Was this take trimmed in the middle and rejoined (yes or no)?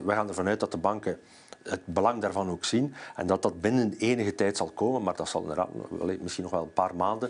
no